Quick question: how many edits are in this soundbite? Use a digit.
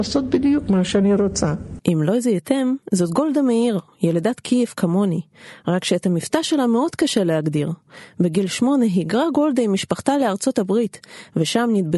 0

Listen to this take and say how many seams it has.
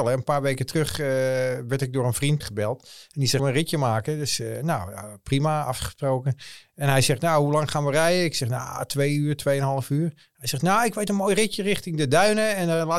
2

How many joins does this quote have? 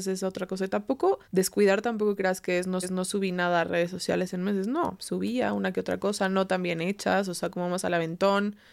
2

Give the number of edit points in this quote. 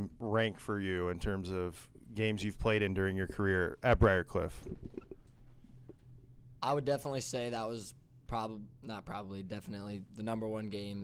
0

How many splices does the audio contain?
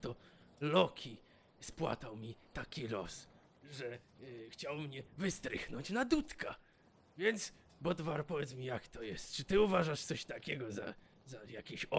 0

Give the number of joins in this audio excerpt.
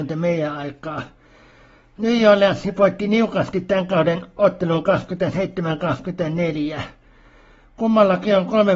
0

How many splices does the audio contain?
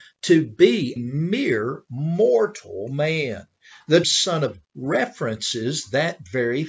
3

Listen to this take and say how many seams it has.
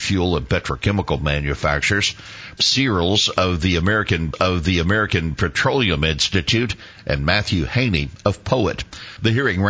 2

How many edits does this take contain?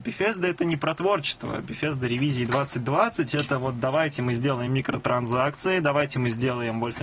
0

